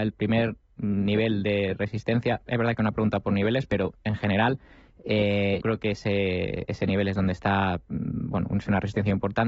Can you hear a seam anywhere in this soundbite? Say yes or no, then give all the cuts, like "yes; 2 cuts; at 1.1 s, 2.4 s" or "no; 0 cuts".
yes; 1 cut; at 5.6 s